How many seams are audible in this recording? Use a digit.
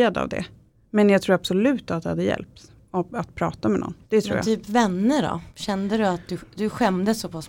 2